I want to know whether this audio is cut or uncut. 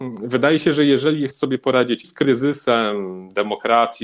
cut